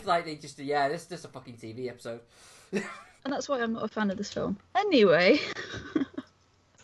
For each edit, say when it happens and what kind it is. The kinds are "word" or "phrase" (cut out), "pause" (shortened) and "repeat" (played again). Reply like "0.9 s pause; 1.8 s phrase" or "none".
3.2 s pause